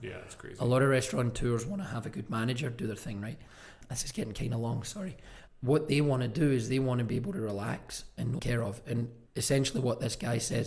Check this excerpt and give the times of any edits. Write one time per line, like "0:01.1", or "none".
0:08.4
0:09.3